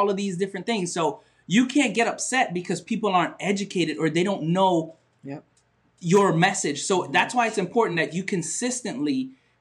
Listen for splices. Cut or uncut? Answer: uncut